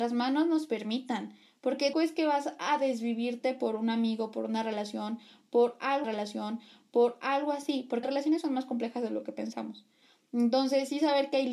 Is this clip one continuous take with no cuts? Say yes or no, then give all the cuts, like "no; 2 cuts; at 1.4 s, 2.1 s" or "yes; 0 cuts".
no; 3 cuts; at 1.9 s, 6.0 s, 8.0 s